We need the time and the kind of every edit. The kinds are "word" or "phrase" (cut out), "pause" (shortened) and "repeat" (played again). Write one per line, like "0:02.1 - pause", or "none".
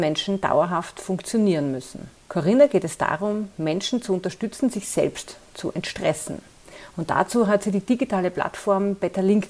0:02.2 - pause